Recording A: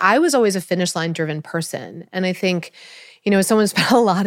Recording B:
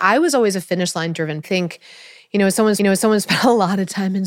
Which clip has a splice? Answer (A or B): B